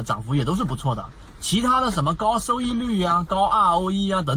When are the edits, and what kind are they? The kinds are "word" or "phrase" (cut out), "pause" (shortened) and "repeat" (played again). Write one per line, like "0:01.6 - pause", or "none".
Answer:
none